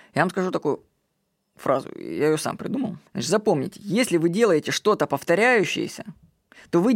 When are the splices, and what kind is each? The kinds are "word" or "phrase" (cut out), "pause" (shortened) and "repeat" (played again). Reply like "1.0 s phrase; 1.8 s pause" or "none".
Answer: 3.1 s pause